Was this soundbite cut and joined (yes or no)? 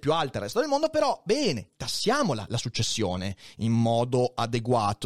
yes